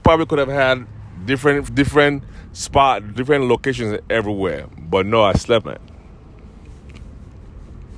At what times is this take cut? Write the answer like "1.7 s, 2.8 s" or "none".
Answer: 1.7 s, 3.2 s, 5.6 s